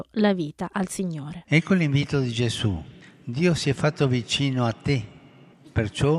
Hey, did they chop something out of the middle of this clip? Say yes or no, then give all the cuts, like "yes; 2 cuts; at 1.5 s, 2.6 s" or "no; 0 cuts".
no; 0 cuts